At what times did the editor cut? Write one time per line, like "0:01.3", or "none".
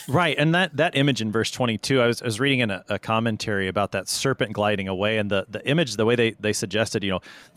none